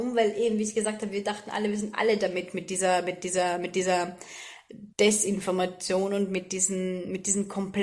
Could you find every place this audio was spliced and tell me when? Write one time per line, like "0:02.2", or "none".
0:04.9